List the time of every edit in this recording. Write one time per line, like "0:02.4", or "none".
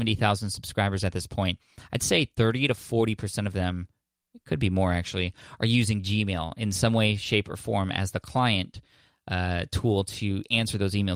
none

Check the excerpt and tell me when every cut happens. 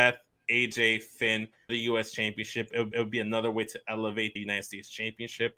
0:01.7
0:02.9
0:04.4

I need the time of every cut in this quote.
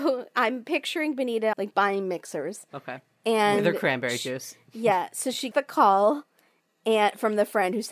0:01.5
0:05.5

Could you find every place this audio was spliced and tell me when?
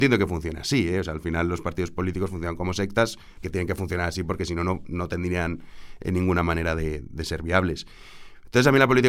0:03.4

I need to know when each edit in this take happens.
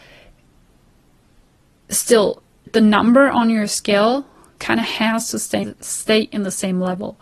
0:02.7
0:04.6
0:05.6

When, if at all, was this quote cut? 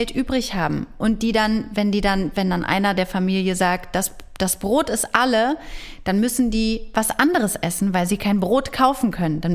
none

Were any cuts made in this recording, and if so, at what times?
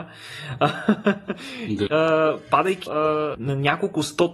0:01.9
0:02.9
0:03.3

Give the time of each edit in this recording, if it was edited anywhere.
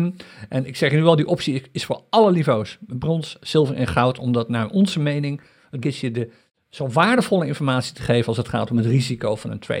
0:05.8

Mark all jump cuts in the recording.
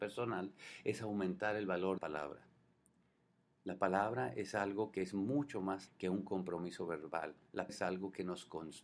0:02.0
0:05.9
0:07.7

